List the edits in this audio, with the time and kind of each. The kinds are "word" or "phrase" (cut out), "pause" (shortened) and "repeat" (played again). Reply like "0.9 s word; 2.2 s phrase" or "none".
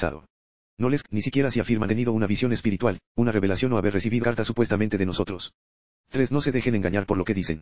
1.0 s word; 1.9 s word; 4.2 s word